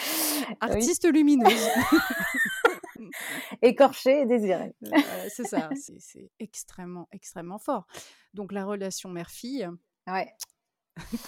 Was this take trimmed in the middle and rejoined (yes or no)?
no